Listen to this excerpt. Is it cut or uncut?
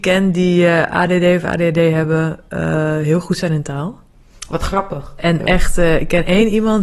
uncut